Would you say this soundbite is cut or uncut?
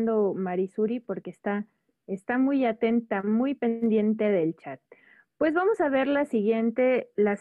uncut